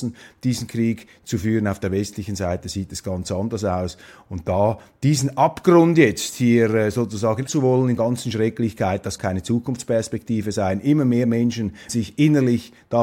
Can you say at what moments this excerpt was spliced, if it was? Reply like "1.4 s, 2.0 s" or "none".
7.5 s, 8.0 s, 9.2 s, 11.9 s

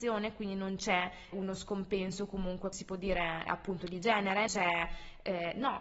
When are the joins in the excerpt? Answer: 1.3 s, 2.7 s, 3.5 s, 4.5 s

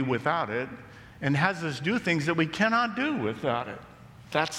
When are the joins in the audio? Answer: none

